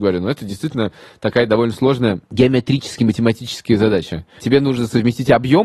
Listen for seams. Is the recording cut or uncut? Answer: uncut